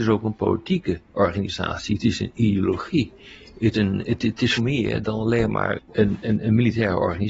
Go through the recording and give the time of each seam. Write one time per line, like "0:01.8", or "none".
0:01.0
0:03.7
0:04.6
0:05.8